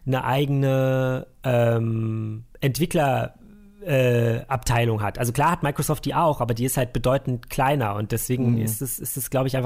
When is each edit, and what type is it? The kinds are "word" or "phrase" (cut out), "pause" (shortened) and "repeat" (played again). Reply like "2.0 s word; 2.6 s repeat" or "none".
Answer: none